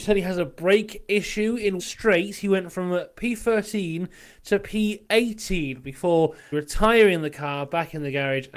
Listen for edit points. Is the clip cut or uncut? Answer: cut